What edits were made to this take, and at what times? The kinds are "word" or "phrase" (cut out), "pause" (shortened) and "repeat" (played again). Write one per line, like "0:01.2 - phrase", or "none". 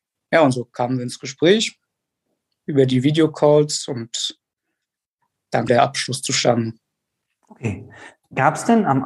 0:05.7 - word